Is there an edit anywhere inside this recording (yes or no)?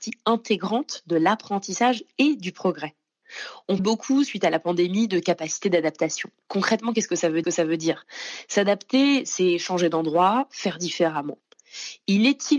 yes